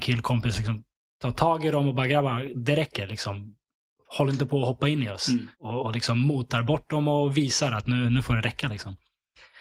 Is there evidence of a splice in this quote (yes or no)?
yes